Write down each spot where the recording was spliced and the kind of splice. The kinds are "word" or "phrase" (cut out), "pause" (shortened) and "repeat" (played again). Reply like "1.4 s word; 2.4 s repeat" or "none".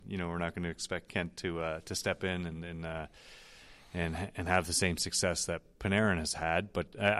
none